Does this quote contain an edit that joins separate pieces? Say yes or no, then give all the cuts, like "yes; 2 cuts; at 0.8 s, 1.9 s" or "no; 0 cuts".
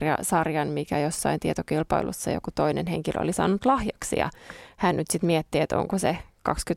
no; 0 cuts